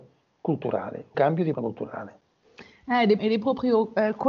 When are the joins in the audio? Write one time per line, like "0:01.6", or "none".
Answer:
0:01.1
0:01.5
0:03.2